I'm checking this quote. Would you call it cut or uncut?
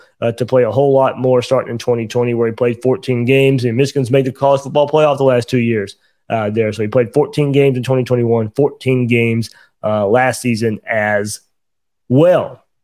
uncut